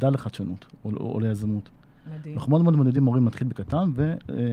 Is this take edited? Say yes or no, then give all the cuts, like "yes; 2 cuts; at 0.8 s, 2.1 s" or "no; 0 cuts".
no; 0 cuts